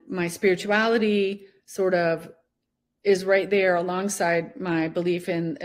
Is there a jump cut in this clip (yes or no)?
no